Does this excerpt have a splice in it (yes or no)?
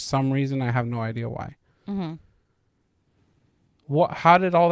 no